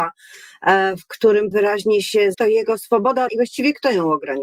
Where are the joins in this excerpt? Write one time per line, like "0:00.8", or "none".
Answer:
0:01.5
0:02.3
0:03.3

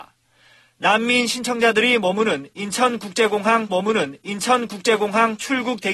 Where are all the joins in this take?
0:03.7

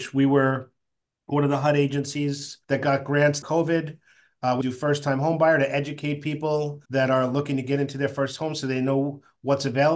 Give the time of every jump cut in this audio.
0:02.6
0:03.4
0:04.6
0:06.8

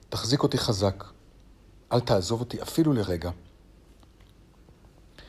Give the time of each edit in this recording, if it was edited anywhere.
none

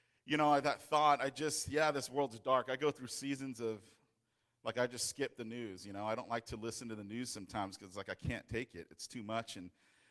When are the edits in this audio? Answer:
none

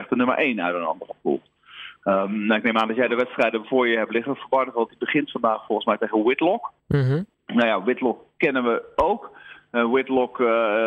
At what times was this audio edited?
0:06.8
0:07.3

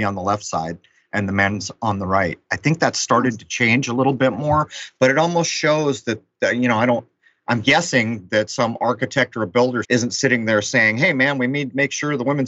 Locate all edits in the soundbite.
0:09.8

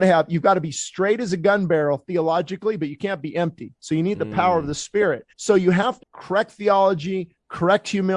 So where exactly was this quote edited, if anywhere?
0:05.3
0:06.0

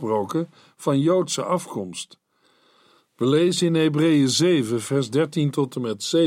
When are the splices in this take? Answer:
none

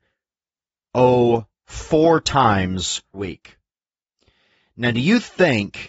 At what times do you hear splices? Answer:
0:03.1

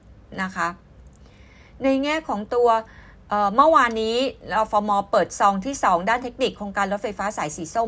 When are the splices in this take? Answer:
none

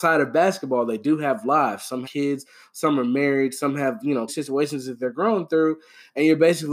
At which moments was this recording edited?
0:02.0
0:04.3

